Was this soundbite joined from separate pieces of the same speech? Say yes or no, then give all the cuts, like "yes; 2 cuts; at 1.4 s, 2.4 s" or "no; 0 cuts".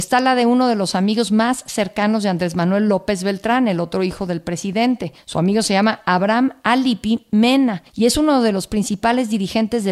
no; 0 cuts